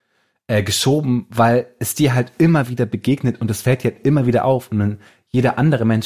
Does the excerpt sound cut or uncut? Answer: uncut